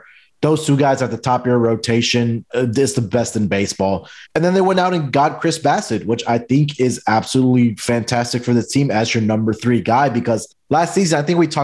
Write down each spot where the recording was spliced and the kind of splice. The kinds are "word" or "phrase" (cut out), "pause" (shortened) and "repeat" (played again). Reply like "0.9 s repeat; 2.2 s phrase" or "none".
2.5 s word; 4.2 s pause; 10.5 s pause